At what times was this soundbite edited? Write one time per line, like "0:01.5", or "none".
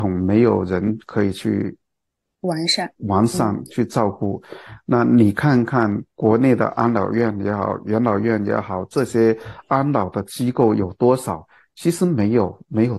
0:03.0
0:06.1

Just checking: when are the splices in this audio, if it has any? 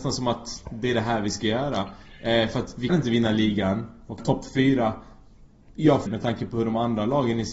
0:02.9
0:04.2
0:06.1

